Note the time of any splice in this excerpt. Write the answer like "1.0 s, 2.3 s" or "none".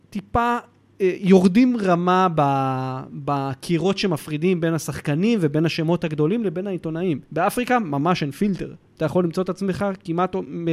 7.3 s